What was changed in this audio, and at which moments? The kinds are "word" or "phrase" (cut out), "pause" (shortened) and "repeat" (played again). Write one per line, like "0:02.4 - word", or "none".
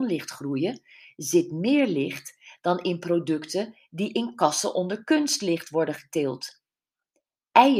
none